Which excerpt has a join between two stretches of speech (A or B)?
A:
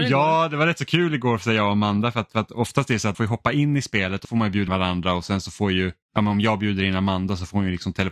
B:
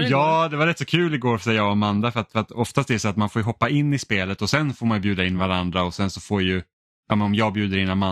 A